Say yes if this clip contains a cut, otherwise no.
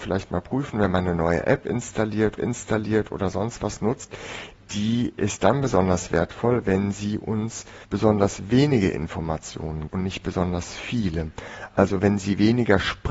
yes